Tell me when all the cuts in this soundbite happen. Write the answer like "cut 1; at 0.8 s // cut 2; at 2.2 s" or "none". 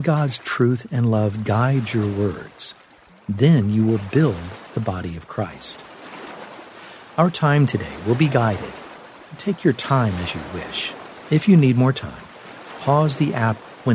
none